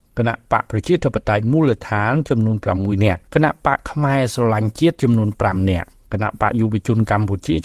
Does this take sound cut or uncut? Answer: cut